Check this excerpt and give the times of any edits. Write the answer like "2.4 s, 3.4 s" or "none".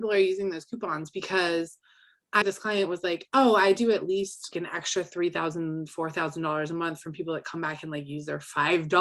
2.4 s, 4.5 s